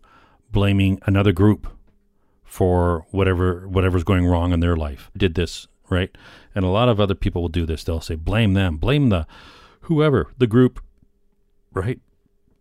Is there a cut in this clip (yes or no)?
yes